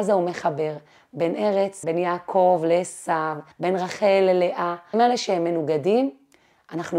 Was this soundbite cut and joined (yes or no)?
yes